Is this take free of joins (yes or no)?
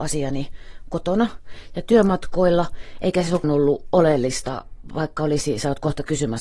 no